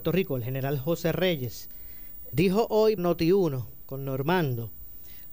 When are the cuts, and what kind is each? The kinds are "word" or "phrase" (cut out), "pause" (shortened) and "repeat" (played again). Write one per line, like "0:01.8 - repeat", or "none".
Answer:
0:02.3 - word
0:03.0 - word